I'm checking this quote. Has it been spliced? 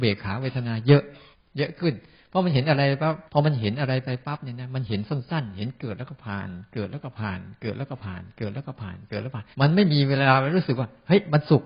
yes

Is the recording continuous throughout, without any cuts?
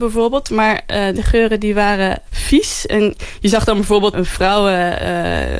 no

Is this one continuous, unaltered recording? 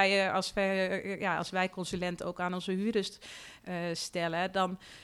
yes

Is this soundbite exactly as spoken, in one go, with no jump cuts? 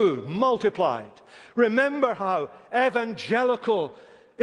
yes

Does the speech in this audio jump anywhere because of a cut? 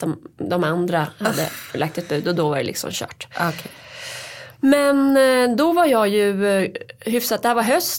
no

